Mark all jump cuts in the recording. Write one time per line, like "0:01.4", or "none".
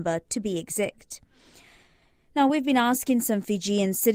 none